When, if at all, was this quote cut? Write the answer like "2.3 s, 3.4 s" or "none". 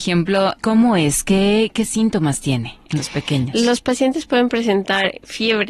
none